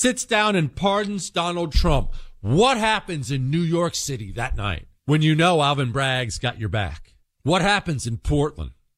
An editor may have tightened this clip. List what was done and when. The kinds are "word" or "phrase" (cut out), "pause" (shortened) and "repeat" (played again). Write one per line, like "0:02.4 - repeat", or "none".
0:05.0 - pause
0:07.2 - pause

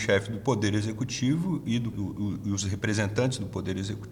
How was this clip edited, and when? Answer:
0:01.9 - word

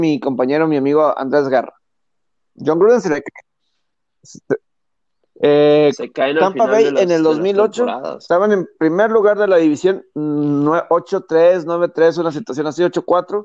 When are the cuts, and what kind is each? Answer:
none

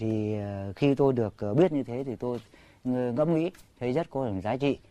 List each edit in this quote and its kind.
none

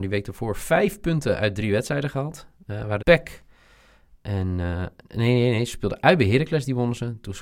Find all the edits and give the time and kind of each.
0:03.0 - phrase

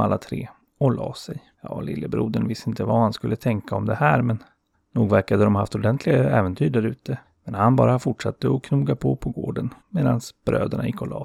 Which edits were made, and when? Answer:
0:01.5 - pause
0:04.7 - pause
0:07.2 - pause
0:09.8 - pause

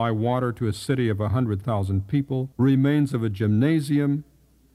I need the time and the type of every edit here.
0:02.5 - pause

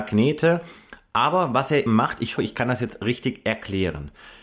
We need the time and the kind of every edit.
0:01.9 - word
0:02.4 - word

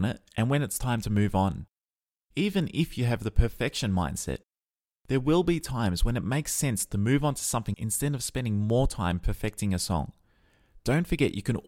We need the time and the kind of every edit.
0:07.7 - word

